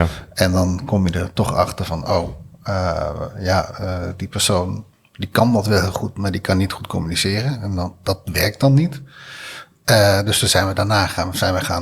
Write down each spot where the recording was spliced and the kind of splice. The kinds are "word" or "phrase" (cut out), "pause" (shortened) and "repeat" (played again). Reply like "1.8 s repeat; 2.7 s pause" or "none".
4.9 s pause

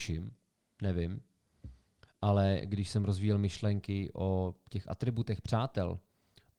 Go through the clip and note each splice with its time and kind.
none

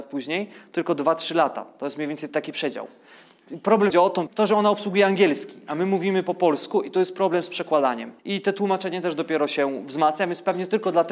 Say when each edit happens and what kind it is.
2.3 s word; 3.9 s phrase; 4.3 s word; 8.2 s pause

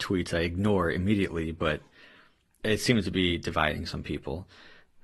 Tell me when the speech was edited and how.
2.6 s word

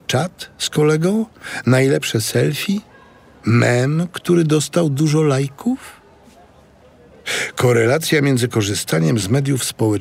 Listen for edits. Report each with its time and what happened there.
none

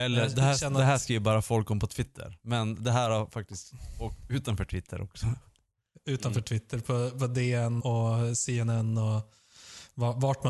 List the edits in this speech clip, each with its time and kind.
7.8 s word

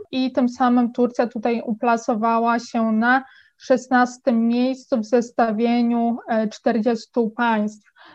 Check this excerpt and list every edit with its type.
none

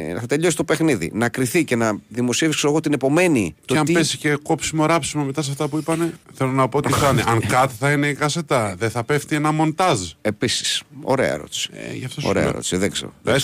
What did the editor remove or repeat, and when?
3.6 s pause; 6.2 s pause

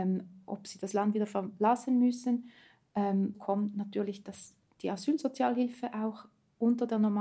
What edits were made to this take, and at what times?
3.3 s word

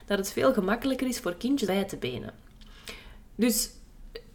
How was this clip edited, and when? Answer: 1.7 s word

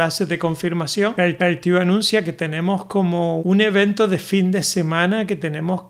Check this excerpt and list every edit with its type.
1.4 s repeat; 3.4 s word

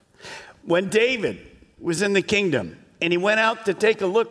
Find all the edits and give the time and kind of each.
none

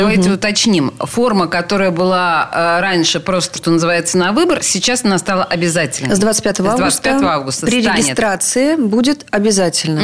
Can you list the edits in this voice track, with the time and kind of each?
3.6 s word

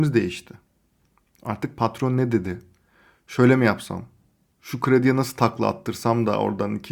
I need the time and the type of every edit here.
none

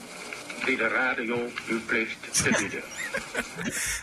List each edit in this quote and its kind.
none

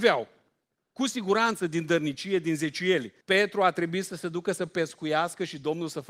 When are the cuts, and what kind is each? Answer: 3.2 s pause

